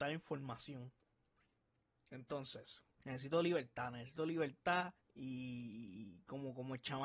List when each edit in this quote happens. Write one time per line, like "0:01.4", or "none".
0:02.9
0:05.0